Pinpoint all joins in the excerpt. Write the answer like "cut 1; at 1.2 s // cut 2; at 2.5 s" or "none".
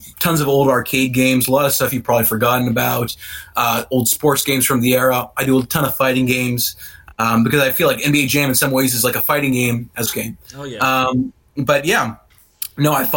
cut 1; at 10.1 s